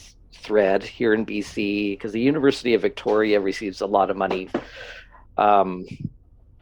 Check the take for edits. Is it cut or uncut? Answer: uncut